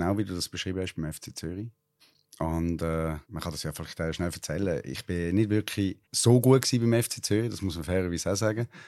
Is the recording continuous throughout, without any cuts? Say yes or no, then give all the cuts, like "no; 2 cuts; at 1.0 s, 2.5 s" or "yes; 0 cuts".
no; 3 cuts; at 2.0 s, 3.2 s, 6.0 s